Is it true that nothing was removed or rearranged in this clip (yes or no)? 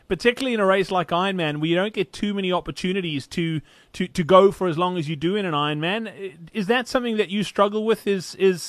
yes